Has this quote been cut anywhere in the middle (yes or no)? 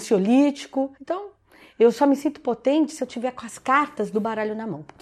yes